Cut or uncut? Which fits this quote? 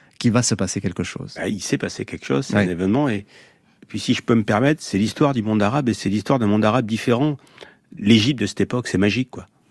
uncut